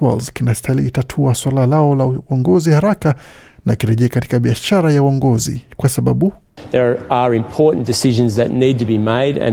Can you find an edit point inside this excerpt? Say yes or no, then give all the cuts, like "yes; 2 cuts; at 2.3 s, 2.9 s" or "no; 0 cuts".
no; 0 cuts